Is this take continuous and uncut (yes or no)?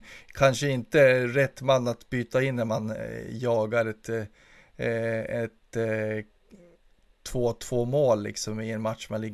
yes